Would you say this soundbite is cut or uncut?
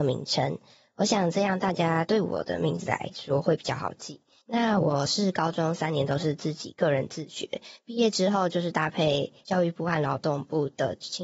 uncut